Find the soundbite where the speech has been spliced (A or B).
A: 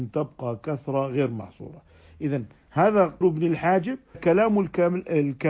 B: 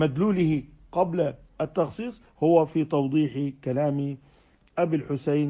A